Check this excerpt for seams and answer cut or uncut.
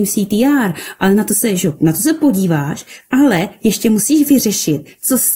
uncut